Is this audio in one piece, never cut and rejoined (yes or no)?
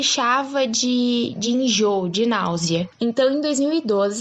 yes